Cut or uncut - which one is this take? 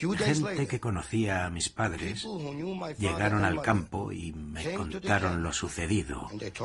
uncut